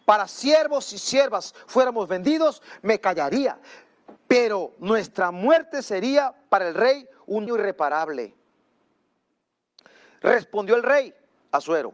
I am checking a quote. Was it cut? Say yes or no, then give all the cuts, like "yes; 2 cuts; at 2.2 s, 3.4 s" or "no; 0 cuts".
yes; 2 cuts; at 4.2 s, 7.5 s